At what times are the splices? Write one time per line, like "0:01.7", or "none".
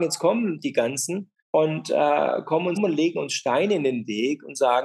0:01.4
0:02.8